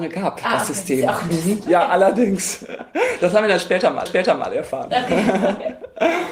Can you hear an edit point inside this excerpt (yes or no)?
yes